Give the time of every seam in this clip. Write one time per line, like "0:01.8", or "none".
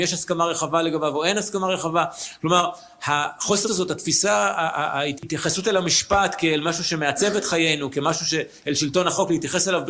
0:03.6